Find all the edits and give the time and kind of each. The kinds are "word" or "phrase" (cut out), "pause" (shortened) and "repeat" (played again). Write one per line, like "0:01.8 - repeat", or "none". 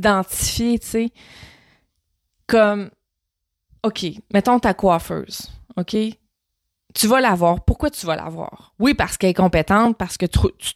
none